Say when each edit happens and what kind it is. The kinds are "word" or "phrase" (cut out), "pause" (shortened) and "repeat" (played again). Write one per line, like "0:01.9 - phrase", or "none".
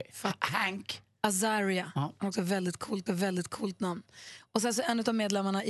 0:03.1 - repeat